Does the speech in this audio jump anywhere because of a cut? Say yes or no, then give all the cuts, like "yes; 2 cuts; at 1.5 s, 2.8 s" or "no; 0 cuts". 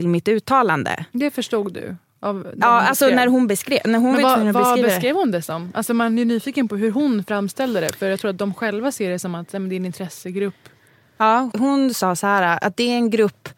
yes; 1 cut; at 11.5 s